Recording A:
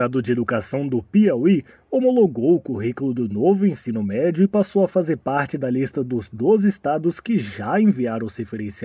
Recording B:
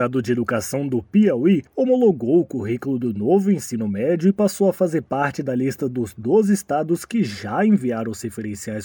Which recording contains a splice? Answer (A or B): B